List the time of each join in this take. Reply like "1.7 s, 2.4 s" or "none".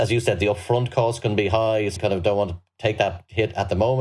2.0 s